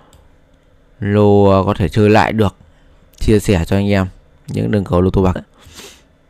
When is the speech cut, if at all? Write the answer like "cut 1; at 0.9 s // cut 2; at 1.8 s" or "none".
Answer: cut 1; at 5.4 s